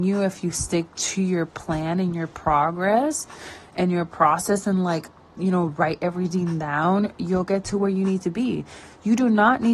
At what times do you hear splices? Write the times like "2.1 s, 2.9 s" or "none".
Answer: none